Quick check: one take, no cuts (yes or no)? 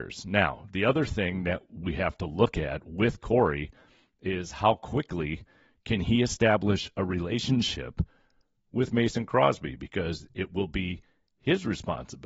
yes